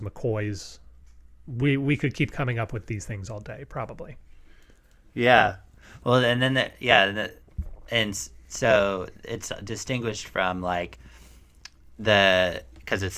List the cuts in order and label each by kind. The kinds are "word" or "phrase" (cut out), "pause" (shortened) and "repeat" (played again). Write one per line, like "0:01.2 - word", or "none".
none